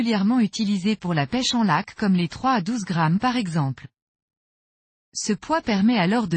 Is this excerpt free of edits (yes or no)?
yes